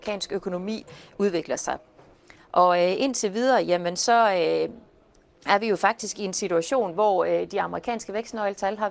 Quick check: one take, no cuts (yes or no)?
yes